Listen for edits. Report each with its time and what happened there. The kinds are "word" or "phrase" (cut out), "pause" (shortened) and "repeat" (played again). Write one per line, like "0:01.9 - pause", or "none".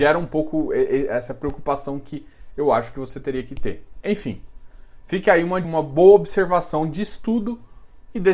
0:05.6 - phrase